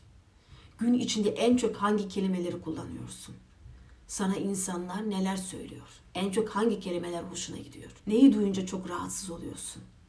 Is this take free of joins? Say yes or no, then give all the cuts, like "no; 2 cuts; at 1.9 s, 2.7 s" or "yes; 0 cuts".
no; 2 cuts; at 6.0 s, 8.0 s